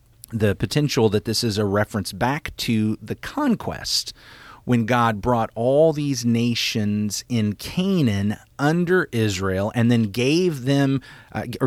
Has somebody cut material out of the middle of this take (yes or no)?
no